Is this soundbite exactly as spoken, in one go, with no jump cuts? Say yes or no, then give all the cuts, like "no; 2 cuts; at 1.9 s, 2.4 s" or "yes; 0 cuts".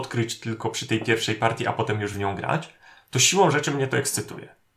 yes; 0 cuts